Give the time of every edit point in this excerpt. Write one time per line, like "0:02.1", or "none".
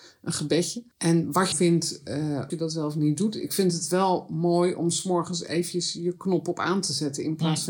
0:00.9
0:01.5
0:02.5